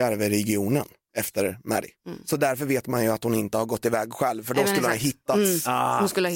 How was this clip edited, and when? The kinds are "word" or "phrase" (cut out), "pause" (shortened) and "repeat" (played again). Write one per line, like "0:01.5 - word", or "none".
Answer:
none